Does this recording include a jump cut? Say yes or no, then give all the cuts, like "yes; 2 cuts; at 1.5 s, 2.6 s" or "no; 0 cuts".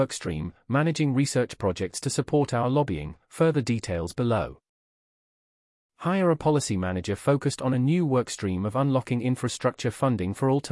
no; 0 cuts